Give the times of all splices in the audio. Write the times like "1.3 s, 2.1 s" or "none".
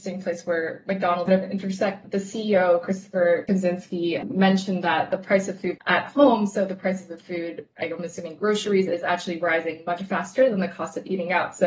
1.3 s